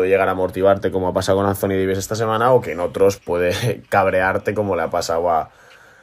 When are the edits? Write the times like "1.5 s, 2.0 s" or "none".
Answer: 3.2 s